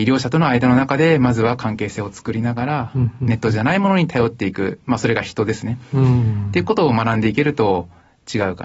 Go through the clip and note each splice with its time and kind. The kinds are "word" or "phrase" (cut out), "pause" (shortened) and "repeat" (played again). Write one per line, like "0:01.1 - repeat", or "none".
none